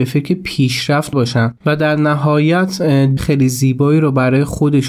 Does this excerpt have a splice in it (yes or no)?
yes